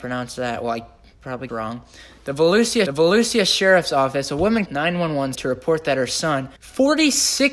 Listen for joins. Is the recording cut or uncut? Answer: cut